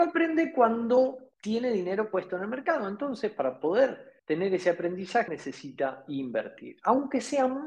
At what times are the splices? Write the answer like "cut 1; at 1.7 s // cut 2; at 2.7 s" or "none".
cut 1; at 1.3 s // cut 2; at 4.2 s // cut 3; at 5.3 s